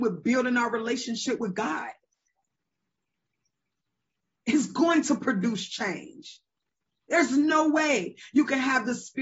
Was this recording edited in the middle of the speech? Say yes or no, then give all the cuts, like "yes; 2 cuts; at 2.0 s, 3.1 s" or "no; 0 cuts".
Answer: no; 0 cuts